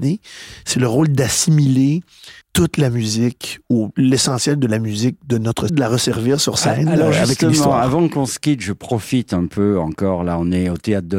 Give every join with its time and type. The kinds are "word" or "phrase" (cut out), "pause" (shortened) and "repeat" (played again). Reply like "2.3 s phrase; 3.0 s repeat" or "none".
2.4 s pause; 5.7 s phrase